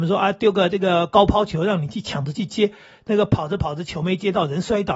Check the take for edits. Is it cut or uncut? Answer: uncut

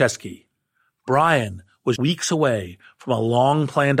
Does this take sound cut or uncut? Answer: cut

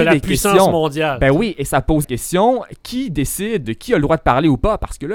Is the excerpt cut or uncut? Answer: cut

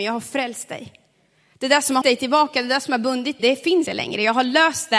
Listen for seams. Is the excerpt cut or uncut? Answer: cut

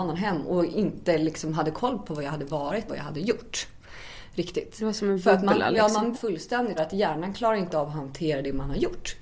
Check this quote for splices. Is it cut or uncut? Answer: cut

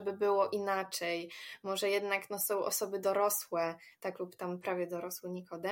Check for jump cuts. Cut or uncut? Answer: uncut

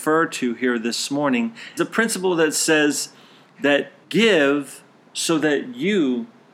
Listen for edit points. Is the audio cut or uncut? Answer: cut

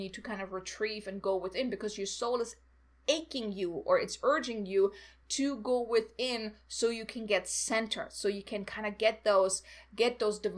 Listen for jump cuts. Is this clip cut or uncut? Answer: uncut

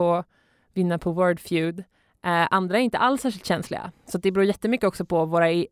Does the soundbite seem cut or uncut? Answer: uncut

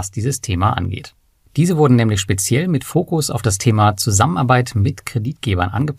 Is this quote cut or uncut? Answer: uncut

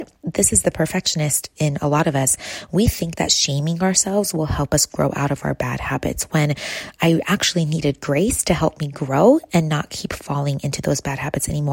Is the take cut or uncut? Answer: uncut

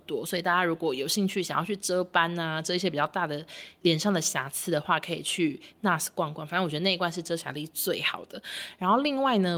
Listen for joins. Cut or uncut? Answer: uncut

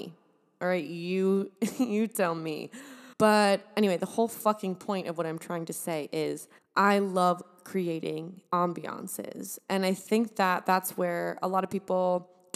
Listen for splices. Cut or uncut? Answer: cut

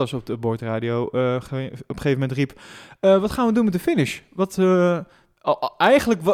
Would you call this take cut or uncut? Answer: uncut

